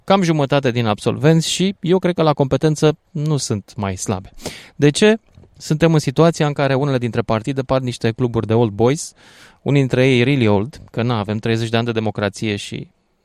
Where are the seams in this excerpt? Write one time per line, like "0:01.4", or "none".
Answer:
none